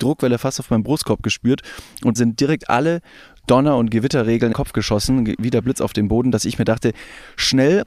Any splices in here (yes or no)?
yes